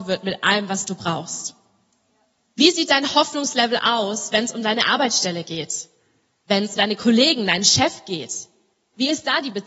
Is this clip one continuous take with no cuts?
no; 1 cut; at 6.8 s

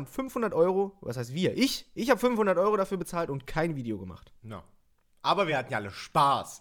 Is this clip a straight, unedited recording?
yes; 0 cuts

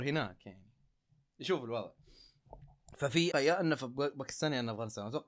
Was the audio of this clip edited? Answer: yes; 1 cut; at 3.3 s

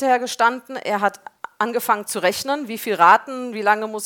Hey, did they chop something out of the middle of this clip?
no; 0 cuts

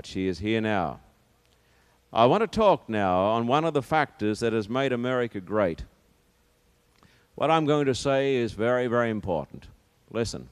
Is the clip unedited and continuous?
yes; 0 cuts

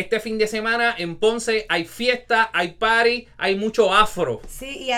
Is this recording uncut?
yes; 0 cuts

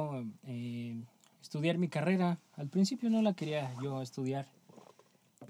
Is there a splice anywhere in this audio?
no; 0 cuts

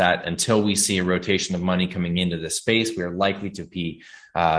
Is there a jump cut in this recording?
no; 0 cuts

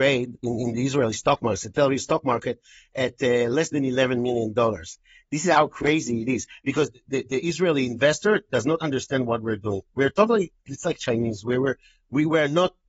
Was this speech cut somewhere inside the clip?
no; 0 cuts

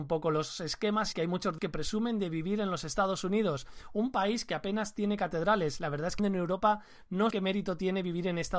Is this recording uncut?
no; 4 cuts; at 1.1 s, 1.6 s, 6.2 s, 7.3 s

